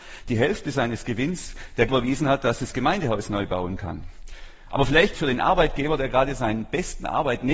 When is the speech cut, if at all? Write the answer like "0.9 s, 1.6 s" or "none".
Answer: 1.9 s, 5.1 s

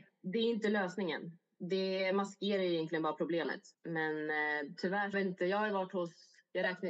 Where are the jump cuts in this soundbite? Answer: 3.7 s, 5.1 s

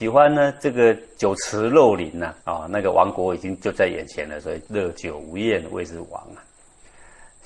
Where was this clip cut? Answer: 2.4 s

